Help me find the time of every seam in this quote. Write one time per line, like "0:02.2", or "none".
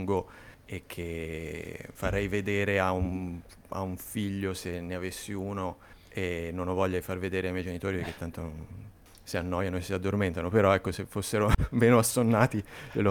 0:02.0
0:05.9